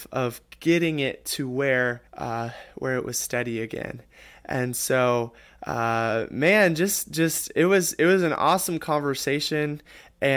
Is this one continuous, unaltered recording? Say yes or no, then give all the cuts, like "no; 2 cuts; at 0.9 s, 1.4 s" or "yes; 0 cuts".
no; 1 cut; at 2.1 s